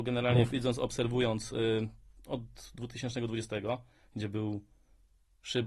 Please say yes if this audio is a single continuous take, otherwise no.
yes